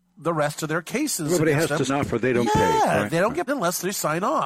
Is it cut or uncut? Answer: cut